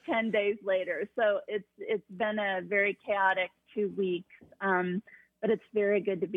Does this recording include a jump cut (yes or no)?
no